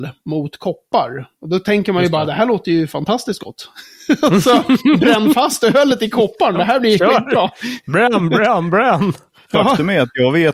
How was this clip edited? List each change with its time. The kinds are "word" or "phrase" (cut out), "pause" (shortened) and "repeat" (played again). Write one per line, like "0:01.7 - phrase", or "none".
none